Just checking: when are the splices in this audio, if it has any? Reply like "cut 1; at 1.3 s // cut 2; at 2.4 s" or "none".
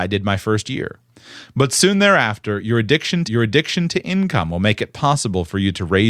cut 1; at 3.3 s